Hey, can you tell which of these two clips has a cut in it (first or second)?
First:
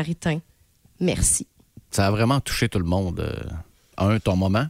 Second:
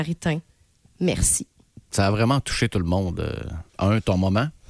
second